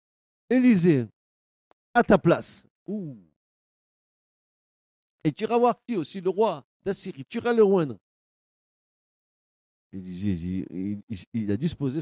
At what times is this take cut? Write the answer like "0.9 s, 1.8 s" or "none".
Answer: 2.8 s, 5.9 s, 6.7 s